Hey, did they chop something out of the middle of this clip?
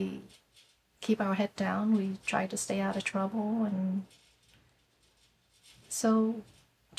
no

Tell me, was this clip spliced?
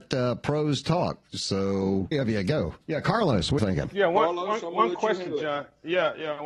yes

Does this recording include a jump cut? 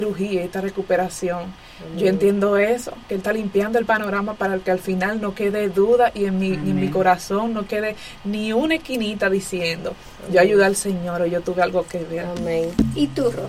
no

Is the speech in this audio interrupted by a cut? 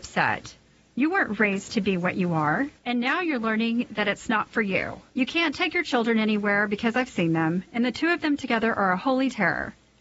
yes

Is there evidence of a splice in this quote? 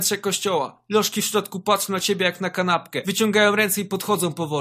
no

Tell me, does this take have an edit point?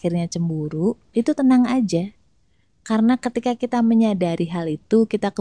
no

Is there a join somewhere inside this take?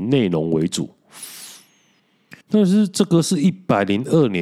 yes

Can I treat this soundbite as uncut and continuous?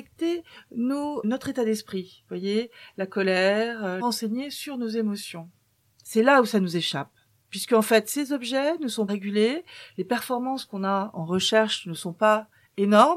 no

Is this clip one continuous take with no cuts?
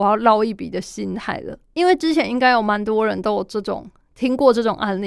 no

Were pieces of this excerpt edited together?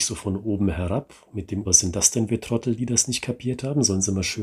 yes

